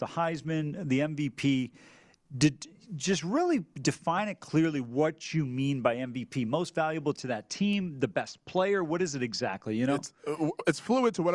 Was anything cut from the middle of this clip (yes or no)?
no